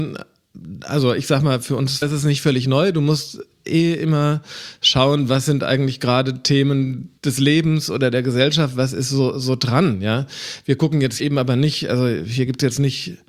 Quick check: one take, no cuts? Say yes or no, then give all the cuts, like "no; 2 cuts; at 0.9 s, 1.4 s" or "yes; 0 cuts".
no; 3 cuts; at 2.0 s, 7.2 s, 11.2 s